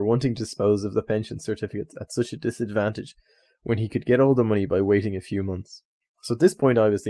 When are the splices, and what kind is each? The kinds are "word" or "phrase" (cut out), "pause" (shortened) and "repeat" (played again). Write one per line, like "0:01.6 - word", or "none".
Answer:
none